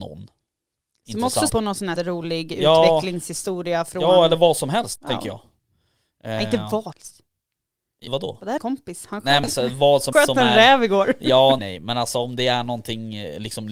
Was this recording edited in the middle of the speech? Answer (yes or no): yes